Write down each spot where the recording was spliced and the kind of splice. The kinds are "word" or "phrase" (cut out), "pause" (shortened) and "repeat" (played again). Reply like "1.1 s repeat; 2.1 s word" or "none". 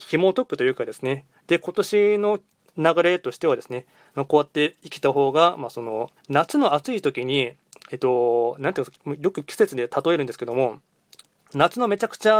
6.2 s pause